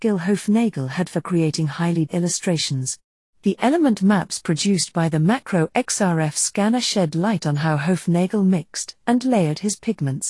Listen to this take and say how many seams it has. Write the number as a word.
one